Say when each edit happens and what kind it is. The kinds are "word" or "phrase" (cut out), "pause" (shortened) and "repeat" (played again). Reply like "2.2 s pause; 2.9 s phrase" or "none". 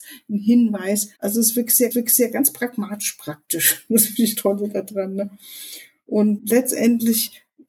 1.1 s pause; 1.9 s repeat; 4.3 s word; 6.4 s word